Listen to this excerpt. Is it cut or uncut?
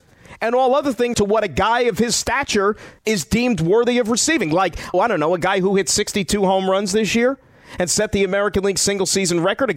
cut